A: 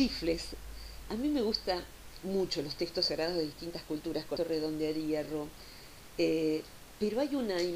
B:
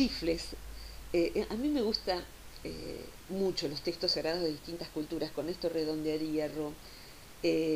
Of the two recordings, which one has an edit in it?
A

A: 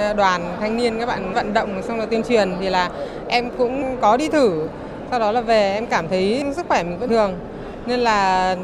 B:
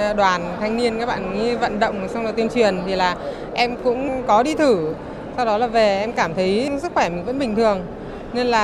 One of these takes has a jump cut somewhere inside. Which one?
A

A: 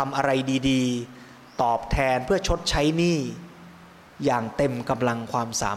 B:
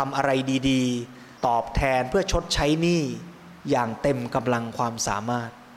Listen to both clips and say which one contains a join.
B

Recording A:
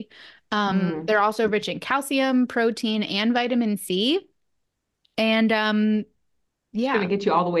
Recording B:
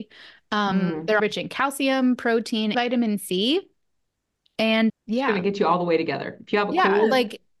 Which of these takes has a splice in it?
B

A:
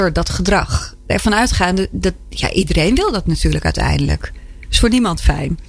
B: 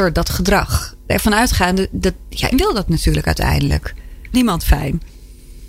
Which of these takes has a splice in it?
B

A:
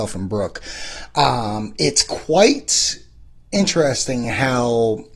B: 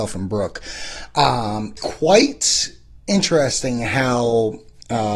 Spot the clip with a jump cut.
B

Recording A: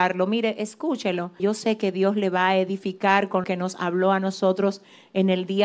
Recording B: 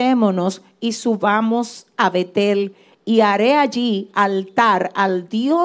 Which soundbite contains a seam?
A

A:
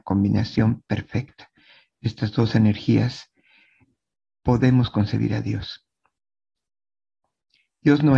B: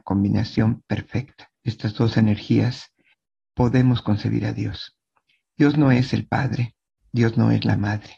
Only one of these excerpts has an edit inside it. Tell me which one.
B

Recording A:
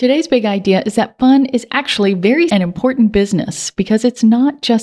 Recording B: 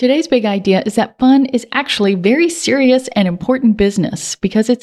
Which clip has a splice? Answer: A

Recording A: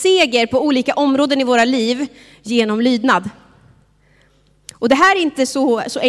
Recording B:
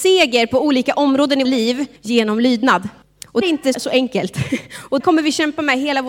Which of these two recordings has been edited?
B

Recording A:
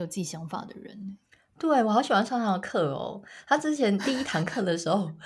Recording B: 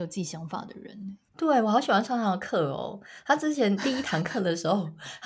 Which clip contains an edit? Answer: B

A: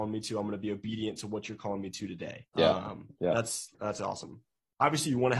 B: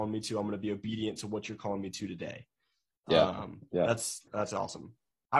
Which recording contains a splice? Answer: A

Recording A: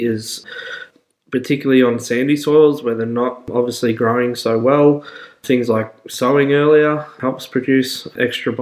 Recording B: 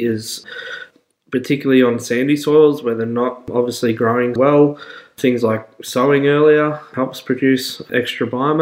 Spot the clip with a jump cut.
B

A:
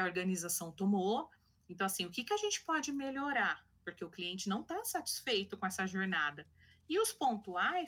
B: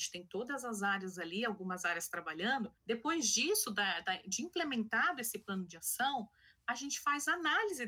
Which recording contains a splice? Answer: B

